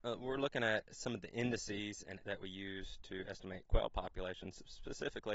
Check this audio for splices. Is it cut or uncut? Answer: cut